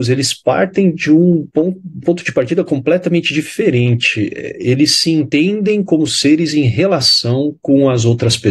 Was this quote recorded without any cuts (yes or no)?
no